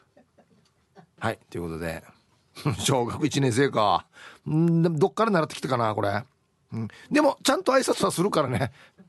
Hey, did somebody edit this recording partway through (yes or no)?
no